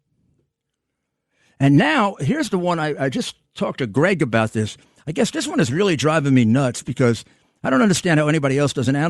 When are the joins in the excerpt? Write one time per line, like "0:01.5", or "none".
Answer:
none

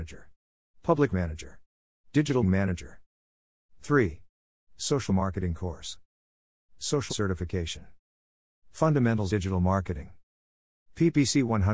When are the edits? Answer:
0:01.1
0:02.4
0:05.1
0:07.1
0:09.3

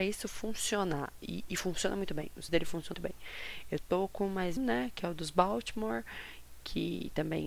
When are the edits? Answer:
0:02.5
0:02.9
0:04.6

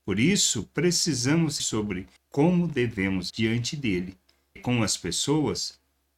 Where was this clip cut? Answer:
0:01.6
0:02.2
0:03.3
0:04.6

